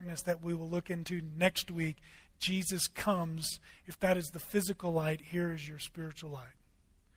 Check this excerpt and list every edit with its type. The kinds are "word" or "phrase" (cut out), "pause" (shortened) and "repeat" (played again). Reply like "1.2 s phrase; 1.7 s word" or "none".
none

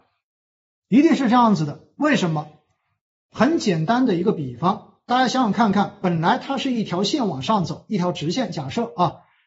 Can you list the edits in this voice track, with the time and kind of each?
none

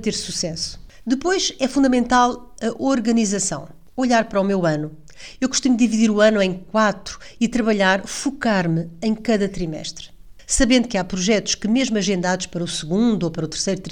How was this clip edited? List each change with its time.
none

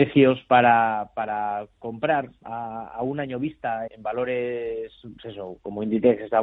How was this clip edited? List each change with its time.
3.9 s word; 5.2 s word

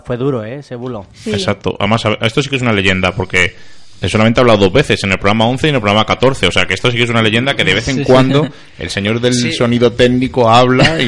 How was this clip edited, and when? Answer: none

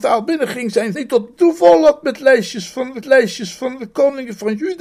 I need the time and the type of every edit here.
0.9 s word; 1.4 s word; 3.0 s repeat

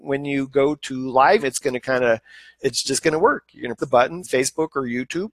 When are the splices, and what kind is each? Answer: 1.4 s word; 2.6 s word; 3.8 s word; 4.2 s word

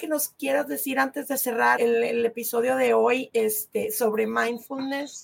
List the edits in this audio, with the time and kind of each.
1.8 s word

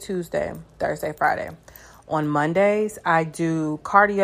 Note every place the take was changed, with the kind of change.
none

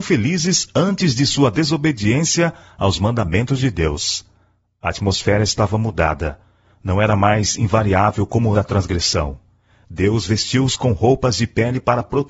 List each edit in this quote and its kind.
8.5 s word

